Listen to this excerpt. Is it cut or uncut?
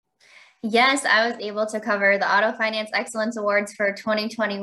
uncut